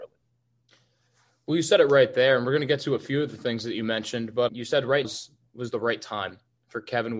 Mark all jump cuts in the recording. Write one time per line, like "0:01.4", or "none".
0:04.5
0:05.0